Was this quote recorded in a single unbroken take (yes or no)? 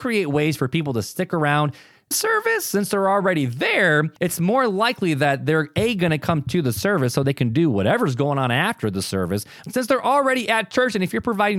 no